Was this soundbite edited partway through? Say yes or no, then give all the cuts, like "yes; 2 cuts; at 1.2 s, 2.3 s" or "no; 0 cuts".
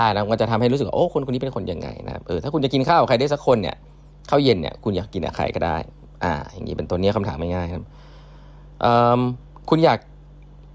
no; 0 cuts